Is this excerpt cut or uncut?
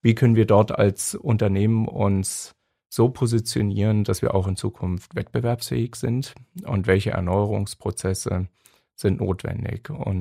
uncut